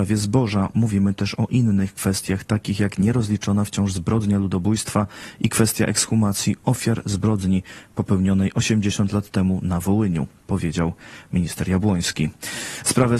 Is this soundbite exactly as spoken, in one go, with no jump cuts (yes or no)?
yes